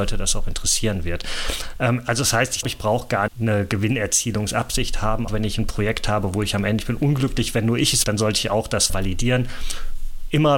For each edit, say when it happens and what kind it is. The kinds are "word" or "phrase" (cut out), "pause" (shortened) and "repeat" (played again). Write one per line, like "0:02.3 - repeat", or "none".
0:02.6 - word
0:03.3 - word
0:05.3 - word
0:06.8 - word
0:08.0 - word
0:08.9 - word